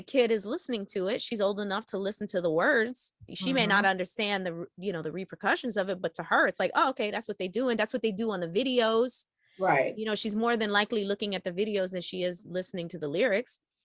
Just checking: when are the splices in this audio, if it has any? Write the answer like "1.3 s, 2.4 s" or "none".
none